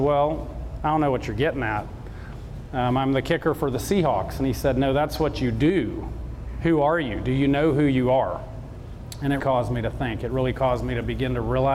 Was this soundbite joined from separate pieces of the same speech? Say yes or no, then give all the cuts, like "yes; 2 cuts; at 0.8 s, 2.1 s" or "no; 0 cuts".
yes; 1 cut; at 9.4 s